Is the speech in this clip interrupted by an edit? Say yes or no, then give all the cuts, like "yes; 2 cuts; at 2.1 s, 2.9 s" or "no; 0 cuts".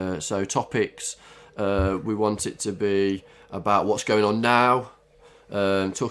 no; 0 cuts